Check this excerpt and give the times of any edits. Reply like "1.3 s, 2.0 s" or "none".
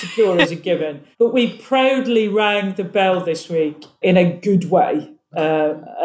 1.1 s